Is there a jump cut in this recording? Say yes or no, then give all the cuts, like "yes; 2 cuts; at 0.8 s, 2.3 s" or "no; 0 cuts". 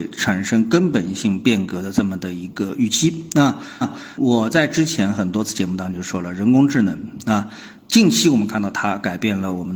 yes; 1 cut; at 3.8 s